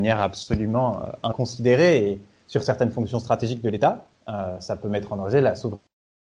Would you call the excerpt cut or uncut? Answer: uncut